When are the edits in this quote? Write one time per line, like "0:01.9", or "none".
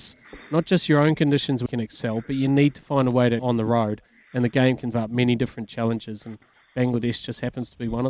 0:01.7
0:03.4
0:04.9